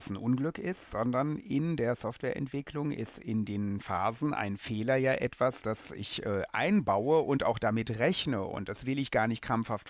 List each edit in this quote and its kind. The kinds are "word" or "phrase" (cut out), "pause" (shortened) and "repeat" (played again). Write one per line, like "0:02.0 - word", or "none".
none